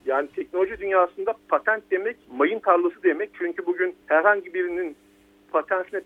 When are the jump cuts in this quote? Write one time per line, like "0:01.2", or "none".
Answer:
0:02.2
0:04.0